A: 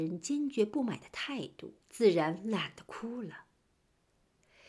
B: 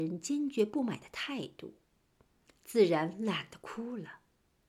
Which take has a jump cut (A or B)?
A